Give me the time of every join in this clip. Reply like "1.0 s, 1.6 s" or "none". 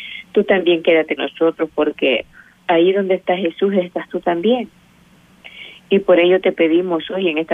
1.2 s, 2.6 s

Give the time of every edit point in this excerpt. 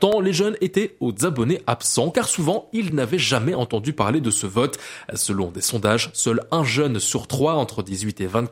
none

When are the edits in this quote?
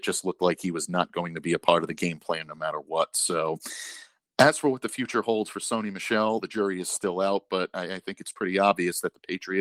none

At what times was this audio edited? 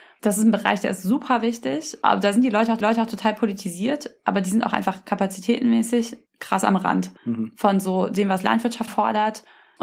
2.8 s, 6.3 s, 7.2 s, 8.9 s

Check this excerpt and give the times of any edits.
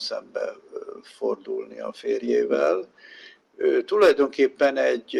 none

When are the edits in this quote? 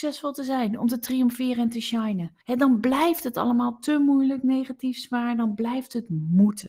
2.4 s

